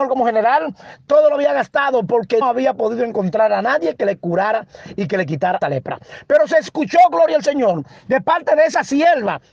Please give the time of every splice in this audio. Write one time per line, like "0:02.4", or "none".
0:02.4
0:05.6